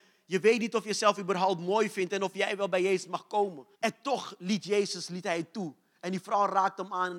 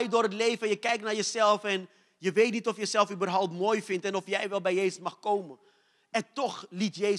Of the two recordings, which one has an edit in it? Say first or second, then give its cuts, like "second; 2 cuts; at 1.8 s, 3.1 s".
first; 1 cut; at 3.7 s